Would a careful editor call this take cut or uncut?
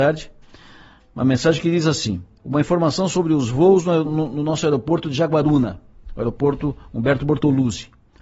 cut